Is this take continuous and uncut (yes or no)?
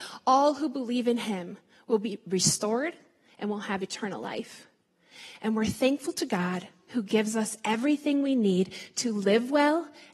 yes